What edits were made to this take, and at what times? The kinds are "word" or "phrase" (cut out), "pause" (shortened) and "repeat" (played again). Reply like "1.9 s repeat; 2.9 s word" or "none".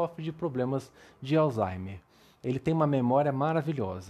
none